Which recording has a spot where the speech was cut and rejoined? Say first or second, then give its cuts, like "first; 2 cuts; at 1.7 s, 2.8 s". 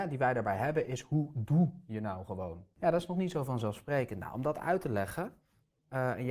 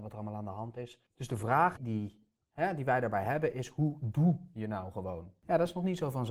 second; 2 cuts; at 1.1 s, 1.8 s